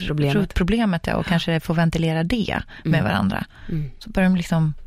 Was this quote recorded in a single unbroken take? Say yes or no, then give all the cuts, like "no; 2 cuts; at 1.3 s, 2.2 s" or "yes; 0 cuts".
yes; 0 cuts